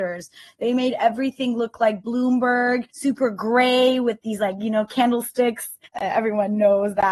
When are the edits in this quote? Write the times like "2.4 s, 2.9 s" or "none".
2.9 s, 5.9 s

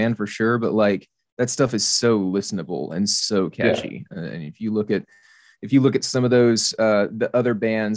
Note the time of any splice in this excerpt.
none

